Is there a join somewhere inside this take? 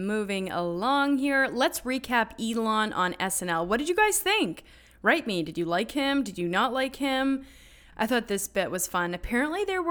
no; 0 cuts

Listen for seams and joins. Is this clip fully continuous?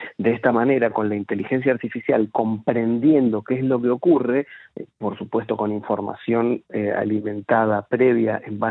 yes; 0 cuts

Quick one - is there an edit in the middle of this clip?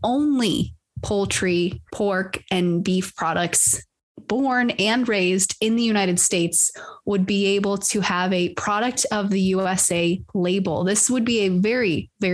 yes; 1 cut; at 1.9 s

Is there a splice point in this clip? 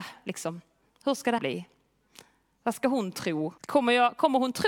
yes; 2 cuts; at 1.4 s, 3.6 s

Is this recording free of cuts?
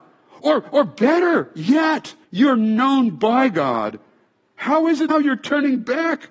no; 2 cuts; at 2.2 s, 5.1 s

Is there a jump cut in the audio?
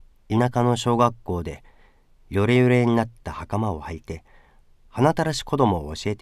no; 0 cuts

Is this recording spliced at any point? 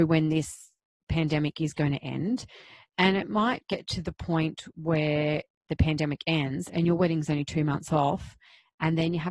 no; 0 cuts

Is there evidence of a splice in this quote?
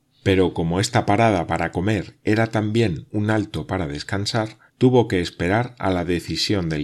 yes; 1 cut; at 4.7 s

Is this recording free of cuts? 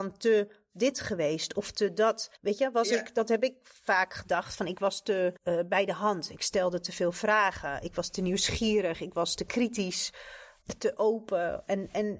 no; 2 cuts; at 2.4 s, 5.4 s

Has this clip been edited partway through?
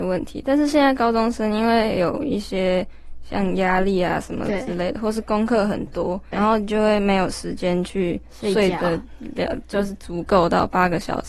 yes; 1 cut; at 6.3 s

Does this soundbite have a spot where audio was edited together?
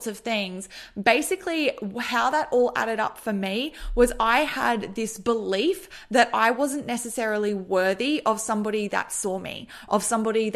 no; 0 cuts

